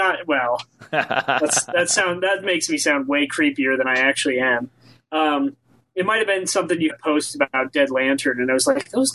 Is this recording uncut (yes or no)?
no